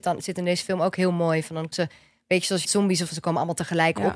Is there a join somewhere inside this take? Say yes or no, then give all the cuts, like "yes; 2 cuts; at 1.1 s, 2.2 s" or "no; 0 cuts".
yes; 3 cuts; at 1.7 s, 2.6 s, 3.1 s